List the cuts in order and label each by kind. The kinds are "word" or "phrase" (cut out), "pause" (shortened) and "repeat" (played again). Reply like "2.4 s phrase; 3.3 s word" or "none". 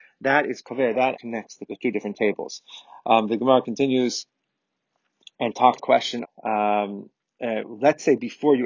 1.1 s word; 1.7 s word; 5.8 s word; 6.2 s word